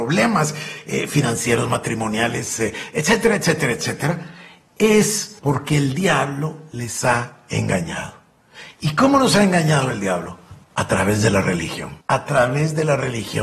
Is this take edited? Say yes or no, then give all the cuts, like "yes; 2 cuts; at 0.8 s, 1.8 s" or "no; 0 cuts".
yes; 3 cuts; at 5.4 s, 10.6 s, 12.0 s